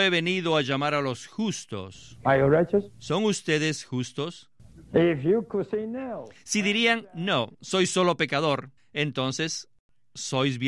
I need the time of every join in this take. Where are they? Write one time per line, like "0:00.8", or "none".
0:07.5
0:08.8